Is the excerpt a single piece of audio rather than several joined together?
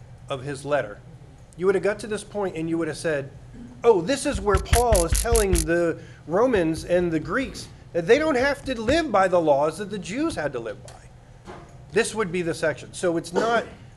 yes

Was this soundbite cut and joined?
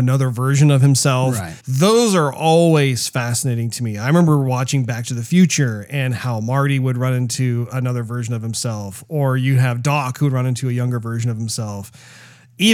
yes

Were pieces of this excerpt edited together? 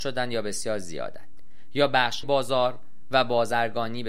yes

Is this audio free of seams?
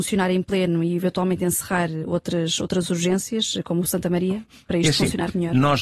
yes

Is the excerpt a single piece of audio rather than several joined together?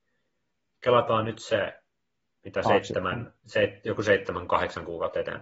yes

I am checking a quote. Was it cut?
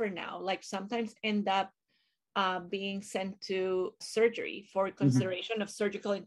yes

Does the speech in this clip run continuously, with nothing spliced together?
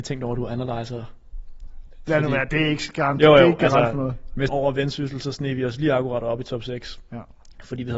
no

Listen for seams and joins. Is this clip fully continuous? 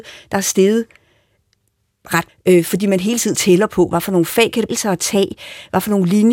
no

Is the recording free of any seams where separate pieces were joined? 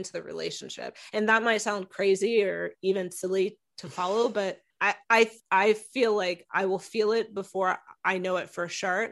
no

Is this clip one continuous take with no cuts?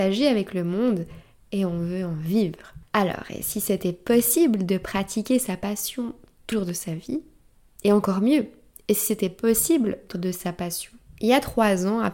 no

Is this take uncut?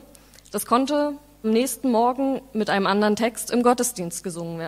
no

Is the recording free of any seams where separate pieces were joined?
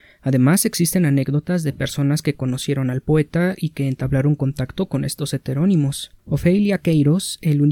no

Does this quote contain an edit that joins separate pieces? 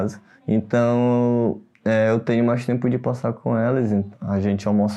no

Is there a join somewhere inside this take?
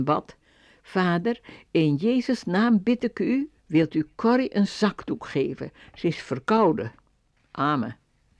yes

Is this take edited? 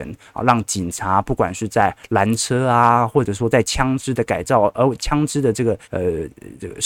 yes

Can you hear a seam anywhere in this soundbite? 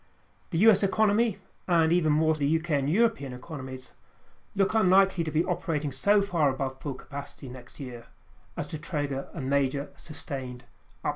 yes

